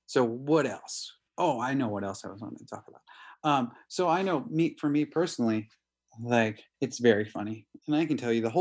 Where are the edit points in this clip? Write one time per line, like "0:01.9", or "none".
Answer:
0:06.7